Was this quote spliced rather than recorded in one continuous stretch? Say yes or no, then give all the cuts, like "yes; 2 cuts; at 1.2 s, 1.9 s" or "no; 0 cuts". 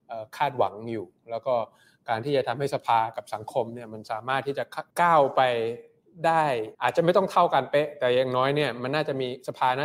yes; 2 cuts; at 4.9 s, 6.7 s